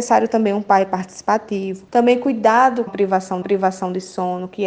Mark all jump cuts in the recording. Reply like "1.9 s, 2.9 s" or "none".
2.9 s, 3.4 s